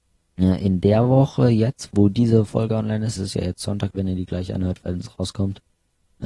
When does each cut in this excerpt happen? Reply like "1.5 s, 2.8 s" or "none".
3.2 s